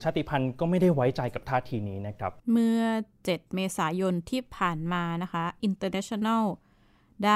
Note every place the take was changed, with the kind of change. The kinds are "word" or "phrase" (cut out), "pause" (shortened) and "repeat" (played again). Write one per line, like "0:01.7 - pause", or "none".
0:02.4 - pause
0:05.6 - word